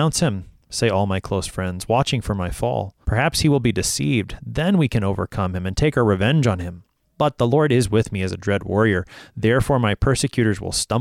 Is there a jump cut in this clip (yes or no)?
yes